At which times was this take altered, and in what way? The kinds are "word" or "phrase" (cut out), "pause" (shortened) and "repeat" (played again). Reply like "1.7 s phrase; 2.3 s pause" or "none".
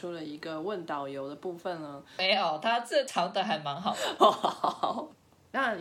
4.2 s word

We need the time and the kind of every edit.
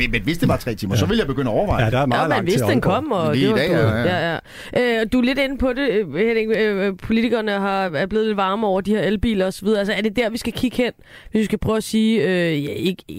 none

